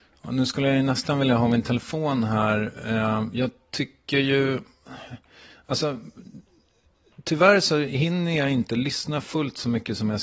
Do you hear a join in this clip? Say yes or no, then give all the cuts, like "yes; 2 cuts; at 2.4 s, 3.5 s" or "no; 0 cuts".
no; 0 cuts